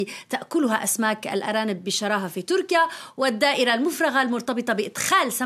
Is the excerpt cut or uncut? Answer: uncut